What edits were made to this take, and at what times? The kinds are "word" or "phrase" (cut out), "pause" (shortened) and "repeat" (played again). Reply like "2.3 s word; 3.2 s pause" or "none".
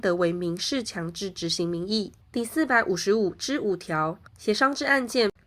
2.2 s pause; 4.3 s pause